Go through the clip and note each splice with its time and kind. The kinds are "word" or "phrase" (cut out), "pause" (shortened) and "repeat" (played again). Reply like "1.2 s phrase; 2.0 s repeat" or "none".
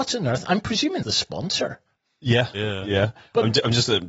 1.0 s word